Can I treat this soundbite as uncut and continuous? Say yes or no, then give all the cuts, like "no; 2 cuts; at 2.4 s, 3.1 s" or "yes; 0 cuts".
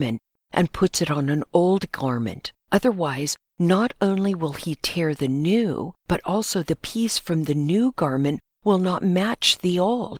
no; 2 cuts; at 2.6 s, 6.0 s